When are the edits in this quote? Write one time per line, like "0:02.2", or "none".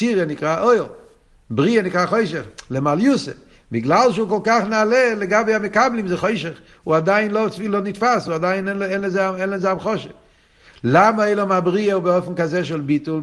none